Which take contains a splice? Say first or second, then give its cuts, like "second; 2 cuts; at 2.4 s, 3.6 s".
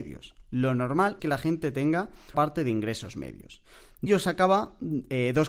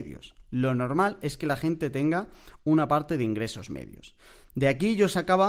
first; 3 cuts; at 1.2 s, 2.3 s, 4.1 s